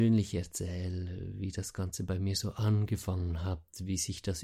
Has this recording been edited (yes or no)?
no